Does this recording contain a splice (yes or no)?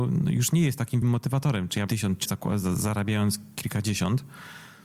yes